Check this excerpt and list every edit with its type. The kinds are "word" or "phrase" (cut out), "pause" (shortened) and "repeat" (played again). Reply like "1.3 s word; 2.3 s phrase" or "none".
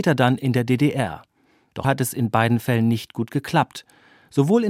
1.8 s word